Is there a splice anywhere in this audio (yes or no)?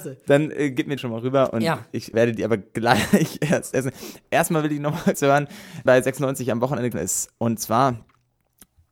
yes